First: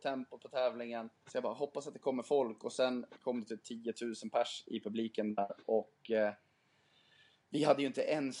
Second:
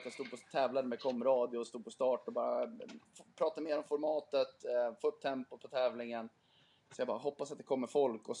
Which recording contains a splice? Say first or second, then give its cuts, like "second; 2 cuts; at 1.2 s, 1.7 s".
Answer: first; 1 cut; at 1.2 s